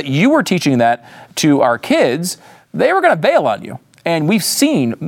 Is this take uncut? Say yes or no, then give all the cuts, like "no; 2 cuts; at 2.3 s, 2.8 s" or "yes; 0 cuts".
yes; 0 cuts